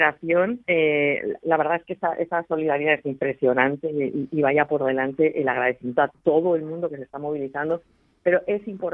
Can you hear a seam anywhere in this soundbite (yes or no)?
no